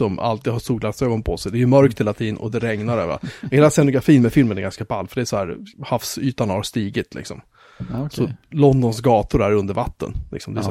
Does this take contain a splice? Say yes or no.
yes